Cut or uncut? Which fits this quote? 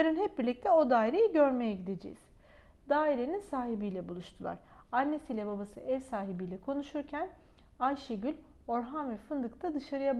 uncut